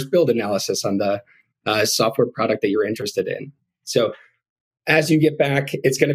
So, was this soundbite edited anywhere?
no; 0 cuts

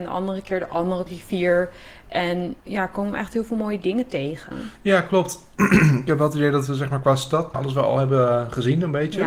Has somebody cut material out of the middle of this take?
yes; 3 cuts; at 1.1 s, 2.6 s, 7.5 s

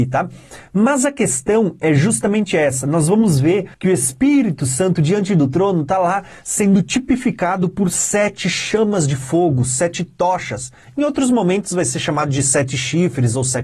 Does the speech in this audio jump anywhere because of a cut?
yes; 1 cut; at 3.7 s

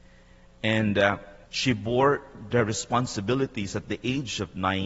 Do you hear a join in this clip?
yes; 1 cut; at 1.4 s

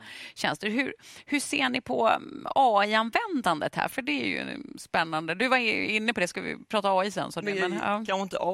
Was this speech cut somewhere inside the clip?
yes; 1 cut; at 7.4 s

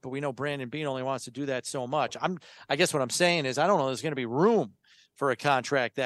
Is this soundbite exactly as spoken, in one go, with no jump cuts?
yes; 0 cuts

